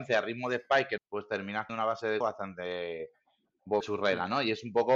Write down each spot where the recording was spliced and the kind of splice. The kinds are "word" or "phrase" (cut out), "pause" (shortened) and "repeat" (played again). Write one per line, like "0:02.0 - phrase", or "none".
0:01.0 - phrase
0:01.7 - word
0:02.2 - word
0:03.8 - word